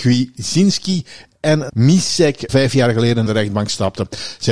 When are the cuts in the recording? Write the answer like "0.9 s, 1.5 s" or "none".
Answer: 1.7 s, 2.5 s, 3.3 s